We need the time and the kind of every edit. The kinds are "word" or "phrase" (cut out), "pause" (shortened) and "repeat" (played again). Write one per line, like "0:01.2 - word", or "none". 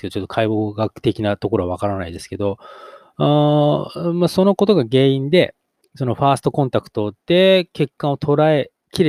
0:05.8 - pause
0:07.2 - pause